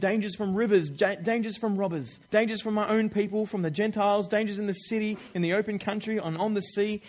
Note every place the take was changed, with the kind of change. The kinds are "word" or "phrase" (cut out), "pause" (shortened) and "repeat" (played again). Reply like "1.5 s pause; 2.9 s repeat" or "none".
2.2 s pause